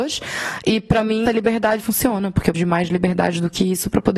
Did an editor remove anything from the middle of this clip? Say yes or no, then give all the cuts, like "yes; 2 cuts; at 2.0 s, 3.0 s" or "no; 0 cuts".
yes; 3 cuts; at 1.2 s, 1.8 s, 2.5 s